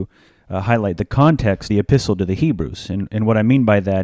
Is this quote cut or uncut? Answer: cut